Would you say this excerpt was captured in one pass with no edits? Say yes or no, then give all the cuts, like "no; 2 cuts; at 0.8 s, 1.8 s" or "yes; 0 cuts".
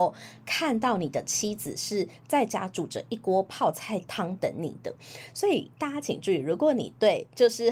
no; 1 cut; at 5.7 s